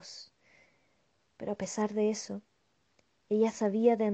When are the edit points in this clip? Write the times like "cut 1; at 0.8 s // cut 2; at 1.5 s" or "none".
none